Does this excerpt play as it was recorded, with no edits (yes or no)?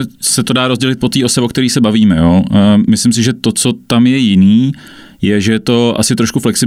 yes